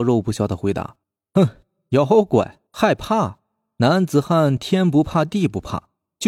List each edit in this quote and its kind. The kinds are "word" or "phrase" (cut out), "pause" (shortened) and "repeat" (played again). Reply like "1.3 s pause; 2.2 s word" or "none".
1.0 s pause; 2.7 s pause